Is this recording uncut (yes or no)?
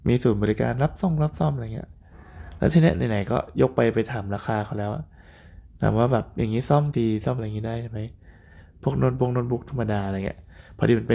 no